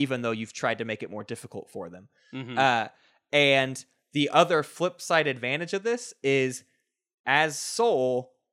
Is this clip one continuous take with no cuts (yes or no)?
yes